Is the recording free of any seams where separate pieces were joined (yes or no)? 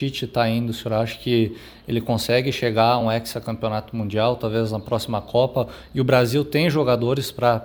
yes